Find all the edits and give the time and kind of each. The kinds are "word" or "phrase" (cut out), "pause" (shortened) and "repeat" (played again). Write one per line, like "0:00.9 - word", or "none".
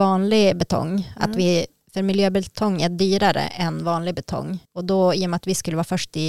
0:04.6 - pause